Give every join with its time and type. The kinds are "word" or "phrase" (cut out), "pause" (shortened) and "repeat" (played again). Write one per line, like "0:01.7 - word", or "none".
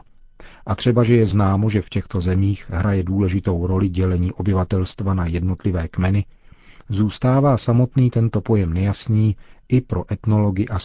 none